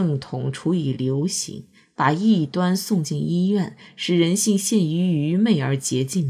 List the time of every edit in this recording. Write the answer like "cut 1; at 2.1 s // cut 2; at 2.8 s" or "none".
none

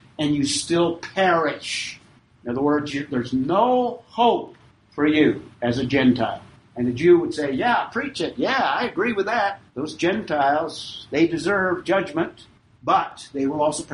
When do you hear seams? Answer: cut 1; at 5.5 s // cut 2; at 9.7 s

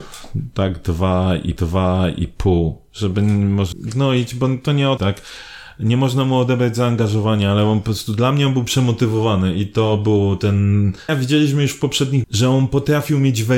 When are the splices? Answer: cut 1; at 1.6 s // cut 2; at 3.7 s // cut 3; at 5.0 s // cut 4; at 11.1 s // cut 5; at 12.2 s

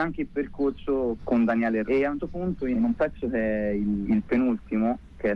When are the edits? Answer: cut 1; at 1.2 s // cut 2; at 1.9 s // cut 3; at 2.2 s // cut 4; at 2.7 s // cut 5; at 4.0 s

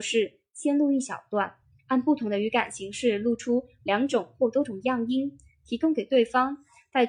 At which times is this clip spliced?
none

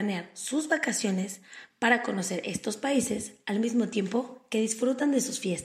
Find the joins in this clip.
none

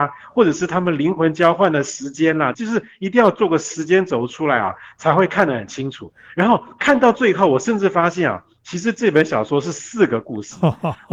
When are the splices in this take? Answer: cut 1; at 2.5 s

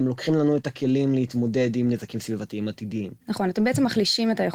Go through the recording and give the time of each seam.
cut 1; at 3.2 s

